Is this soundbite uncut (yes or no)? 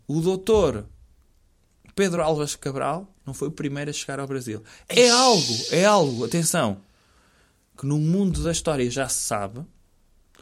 yes